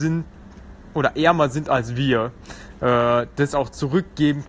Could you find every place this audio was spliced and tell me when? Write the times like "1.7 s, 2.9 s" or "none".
none